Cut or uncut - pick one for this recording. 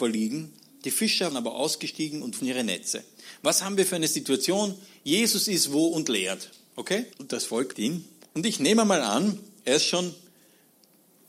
cut